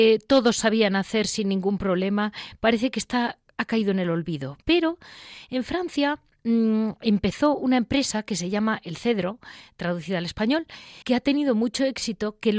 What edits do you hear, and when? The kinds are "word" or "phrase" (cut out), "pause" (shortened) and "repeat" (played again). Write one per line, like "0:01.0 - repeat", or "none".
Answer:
0:04.6 - pause
0:11.0 - pause